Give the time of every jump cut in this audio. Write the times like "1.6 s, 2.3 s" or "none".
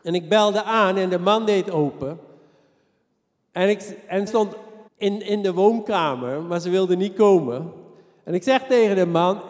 4.3 s, 4.9 s

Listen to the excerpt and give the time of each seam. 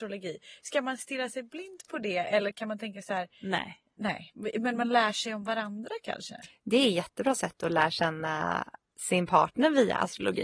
none

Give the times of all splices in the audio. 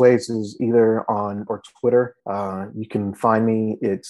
1.5 s, 2.2 s

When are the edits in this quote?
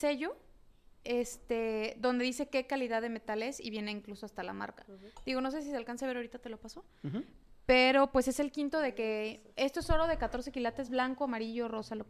none

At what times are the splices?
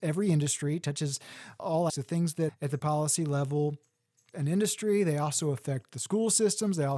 1.9 s, 2.5 s, 2.8 s, 4.3 s

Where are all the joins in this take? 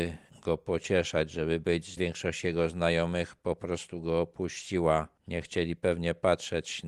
2.0 s

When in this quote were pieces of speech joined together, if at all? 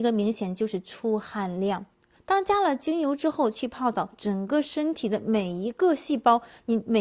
1.9 s

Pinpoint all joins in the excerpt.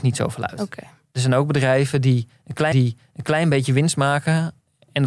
2.7 s

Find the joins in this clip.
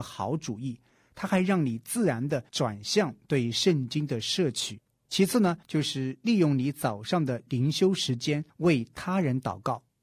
2.5 s, 4.9 s, 5.6 s, 8.5 s

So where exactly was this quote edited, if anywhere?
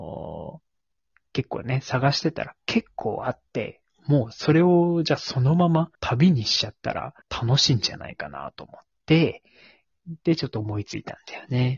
5.9 s, 7.2 s

